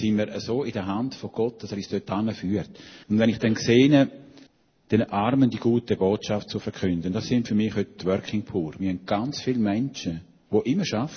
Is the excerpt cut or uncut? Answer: cut